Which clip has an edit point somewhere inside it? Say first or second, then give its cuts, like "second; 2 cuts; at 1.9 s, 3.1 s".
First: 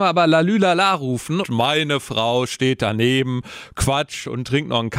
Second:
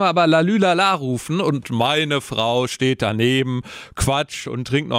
first; 1 cut; at 1.4 s